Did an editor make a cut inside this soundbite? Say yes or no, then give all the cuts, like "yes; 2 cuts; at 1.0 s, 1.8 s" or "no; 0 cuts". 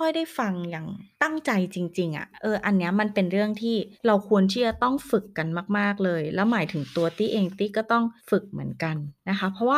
yes; 3 cuts; at 1.1 s, 3.9 s, 8.2 s